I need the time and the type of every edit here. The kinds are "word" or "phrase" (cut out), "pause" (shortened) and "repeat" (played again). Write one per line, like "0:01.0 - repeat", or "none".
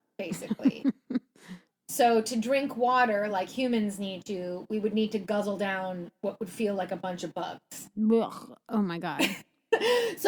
none